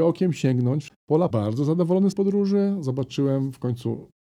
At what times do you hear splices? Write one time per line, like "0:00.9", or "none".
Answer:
0:01.3
0:02.1